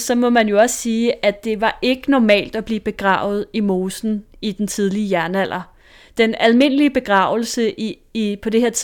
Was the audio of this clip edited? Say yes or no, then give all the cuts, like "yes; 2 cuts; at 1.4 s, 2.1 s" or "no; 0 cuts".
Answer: no; 0 cuts